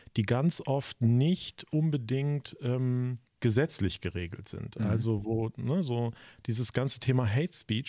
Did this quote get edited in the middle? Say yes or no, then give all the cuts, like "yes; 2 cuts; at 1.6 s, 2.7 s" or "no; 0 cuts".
yes; 1 cut; at 3.3 s